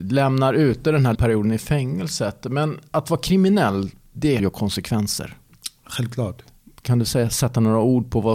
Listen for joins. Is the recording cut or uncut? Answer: cut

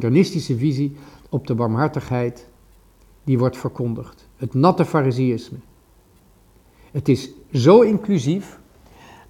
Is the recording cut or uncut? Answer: uncut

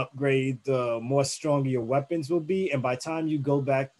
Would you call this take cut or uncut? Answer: uncut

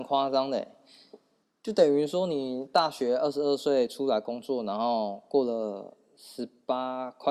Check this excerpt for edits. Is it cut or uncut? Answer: cut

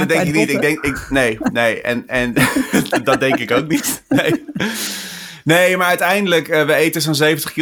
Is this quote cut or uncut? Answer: uncut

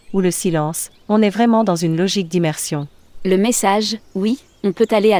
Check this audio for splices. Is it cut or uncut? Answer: uncut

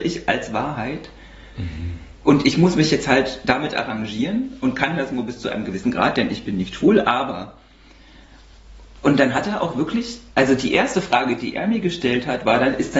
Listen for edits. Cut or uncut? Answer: uncut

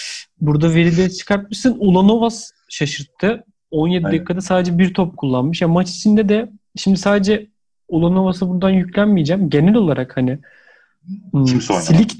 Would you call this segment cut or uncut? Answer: uncut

